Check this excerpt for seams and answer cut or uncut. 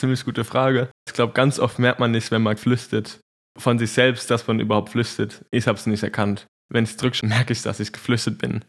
cut